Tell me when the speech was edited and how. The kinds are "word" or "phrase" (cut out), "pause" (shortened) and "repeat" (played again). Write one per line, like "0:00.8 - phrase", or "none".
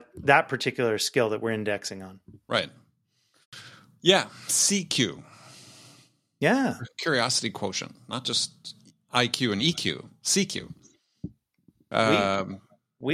none